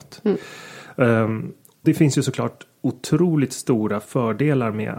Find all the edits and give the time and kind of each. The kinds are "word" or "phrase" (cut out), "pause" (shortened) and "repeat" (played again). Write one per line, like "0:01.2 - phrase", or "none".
0:01.8 - word